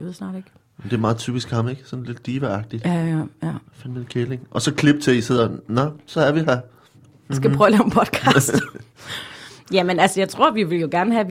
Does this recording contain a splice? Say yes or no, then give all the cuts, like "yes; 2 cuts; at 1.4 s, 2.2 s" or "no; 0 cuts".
yes; 1 cut; at 3.7 s